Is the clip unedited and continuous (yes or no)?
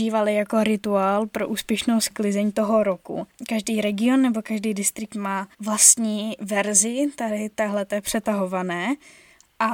no